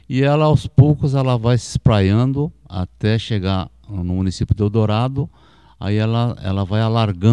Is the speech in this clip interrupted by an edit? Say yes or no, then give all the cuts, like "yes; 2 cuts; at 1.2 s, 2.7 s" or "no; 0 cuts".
no; 0 cuts